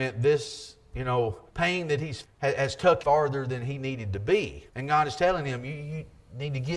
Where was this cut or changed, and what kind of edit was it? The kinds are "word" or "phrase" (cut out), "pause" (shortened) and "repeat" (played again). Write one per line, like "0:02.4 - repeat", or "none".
0:01.5 - pause
0:02.2 - word
0:03.0 - word
0:04.7 - pause

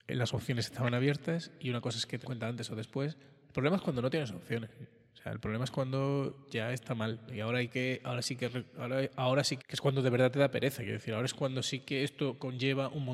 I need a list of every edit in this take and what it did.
0:02.2 - word
0:09.6 - word

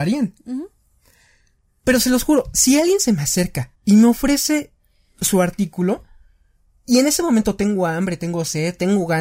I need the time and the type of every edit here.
0:03.7 - pause

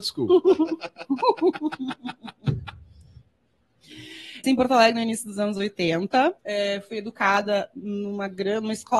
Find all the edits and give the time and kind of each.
0:04.4 - word
0:06.4 - pause

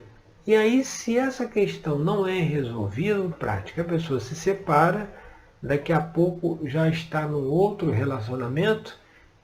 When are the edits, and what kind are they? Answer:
0:03.3 - phrase

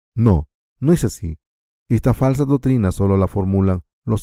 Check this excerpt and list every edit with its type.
none

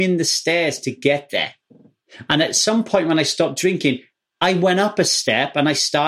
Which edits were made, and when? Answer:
none

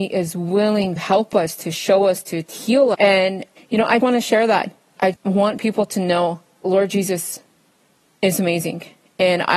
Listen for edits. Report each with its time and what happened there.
0:01.0 - word
0:02.9 - word
0:03.6 - word
0:04.0 - word
0:05.1 - word
0:06.6 - word

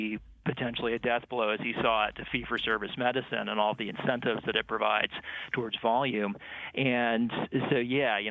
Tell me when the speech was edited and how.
none

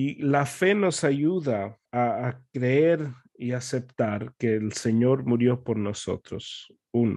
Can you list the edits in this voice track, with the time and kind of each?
0:01.9 - pause

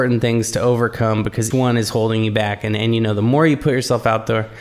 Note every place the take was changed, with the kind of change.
0:01.5 - word

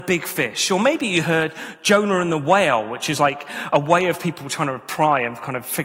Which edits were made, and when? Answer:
none

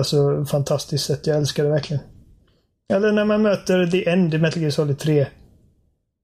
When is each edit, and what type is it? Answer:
none

